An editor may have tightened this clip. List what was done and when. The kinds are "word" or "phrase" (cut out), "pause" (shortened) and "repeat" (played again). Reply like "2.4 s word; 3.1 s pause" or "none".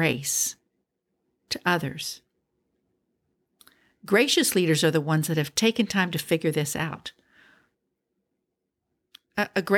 none